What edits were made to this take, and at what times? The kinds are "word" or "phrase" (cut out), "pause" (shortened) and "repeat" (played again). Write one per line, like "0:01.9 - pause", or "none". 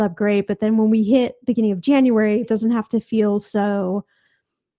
0:02.4 - word